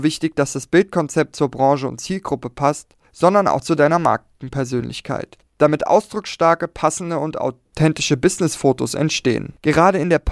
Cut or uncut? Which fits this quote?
uncut